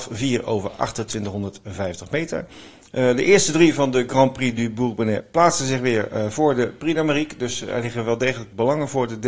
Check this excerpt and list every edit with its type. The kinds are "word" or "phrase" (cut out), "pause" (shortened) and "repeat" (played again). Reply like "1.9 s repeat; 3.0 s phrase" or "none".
none